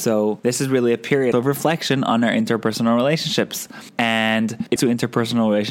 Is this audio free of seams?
no; 2 cuts; at 1.3 s, 4.8 s

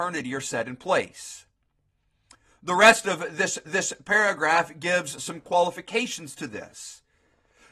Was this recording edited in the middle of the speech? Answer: yes; 1 cut; at 3.7 s

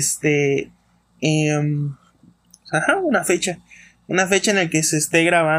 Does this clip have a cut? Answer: no; 0 cuts

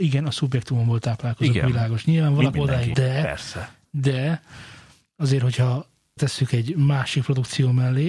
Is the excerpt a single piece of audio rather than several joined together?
no; 3 cuts; at 2.5 s, 2.9 s, 6.2 s

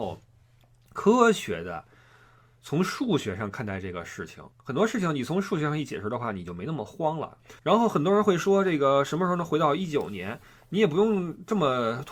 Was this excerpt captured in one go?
no; 2 cuts; at 4.5 s, 7.6 s

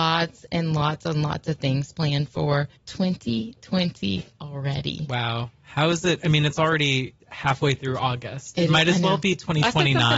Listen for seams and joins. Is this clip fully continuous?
no; 2 cuts; at 2.8 s, 7.2 s

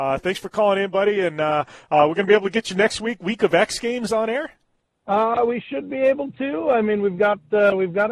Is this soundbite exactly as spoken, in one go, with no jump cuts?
yes; 0 cuts

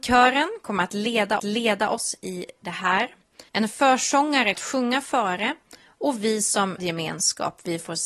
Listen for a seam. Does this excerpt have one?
yes; 4 cuts; at 1.4 s, 3.5 s, 4.5 s, 6.8 s

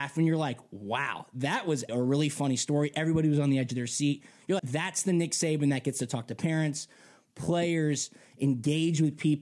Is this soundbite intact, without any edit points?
no; 2 cuts; at 1.9 s, 4.6 s

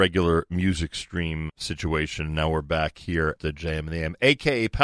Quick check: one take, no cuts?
no; 2 cuts; at 1.5 s, 3.4 s

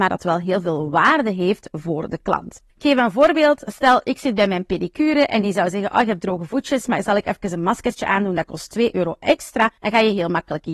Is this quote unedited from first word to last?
no; 2 cuts; at 2.7 s, 9.8 s

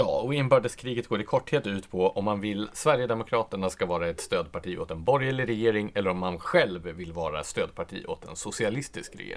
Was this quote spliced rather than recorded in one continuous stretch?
yes; 1 cut; at 2.7 s

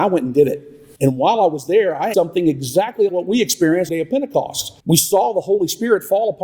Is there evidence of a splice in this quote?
yes; 5 cuts; at 1.0 s, 2.1 s, 3.1 s, 3.9 s, 4.8 s

